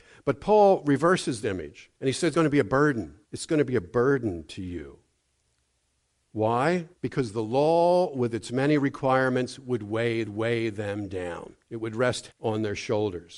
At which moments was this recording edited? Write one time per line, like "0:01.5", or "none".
0:01.4
0:01.9
0:02.3
0:03.2
0:06.9
0:10.3
0:11.6
0:12.3